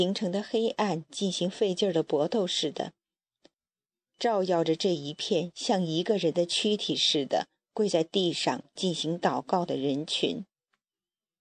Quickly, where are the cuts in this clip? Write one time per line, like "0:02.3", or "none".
none